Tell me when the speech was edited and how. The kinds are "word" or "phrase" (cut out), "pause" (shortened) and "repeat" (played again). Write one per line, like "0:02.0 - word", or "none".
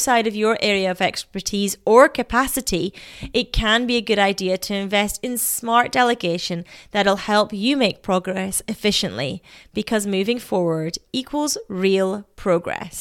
none